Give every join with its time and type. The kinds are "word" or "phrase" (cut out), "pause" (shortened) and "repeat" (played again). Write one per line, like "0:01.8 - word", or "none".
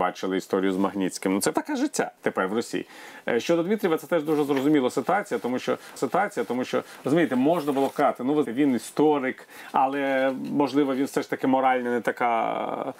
0:01.5 - word
0:02.2 - pause
0:06.0 - repeat
0:08.5 - word